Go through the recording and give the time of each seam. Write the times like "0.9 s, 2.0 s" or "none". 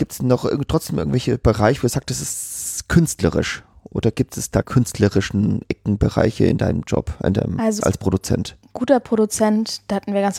4.6 s, 7.8 s